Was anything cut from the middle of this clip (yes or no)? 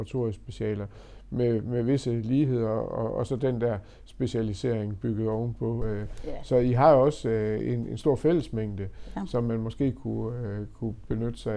no